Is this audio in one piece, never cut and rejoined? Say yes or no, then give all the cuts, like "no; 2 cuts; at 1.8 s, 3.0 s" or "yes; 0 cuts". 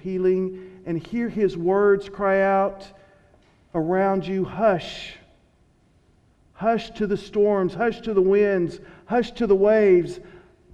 yes; 0 cuts